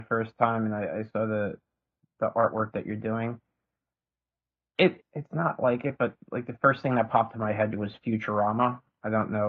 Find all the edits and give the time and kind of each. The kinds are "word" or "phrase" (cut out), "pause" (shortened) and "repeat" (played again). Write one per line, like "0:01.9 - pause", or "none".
0:05.0 - word
0:07.3 - word